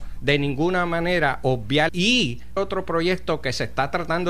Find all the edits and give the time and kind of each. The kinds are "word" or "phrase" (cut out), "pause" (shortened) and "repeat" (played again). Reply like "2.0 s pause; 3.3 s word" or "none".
1.9 s word; 2.6 s word